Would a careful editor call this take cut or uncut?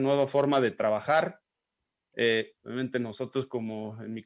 cut